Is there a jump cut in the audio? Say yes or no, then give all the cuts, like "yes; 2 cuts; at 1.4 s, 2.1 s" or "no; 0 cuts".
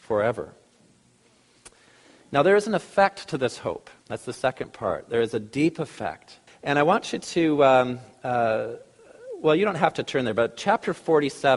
yes; 2 cuts; at 4.0 s, 6.5 s